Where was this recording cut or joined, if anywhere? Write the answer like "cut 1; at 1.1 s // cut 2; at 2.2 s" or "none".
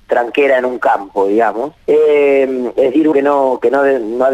cut 1; at 1.8 s // cut 2; at 3.1 s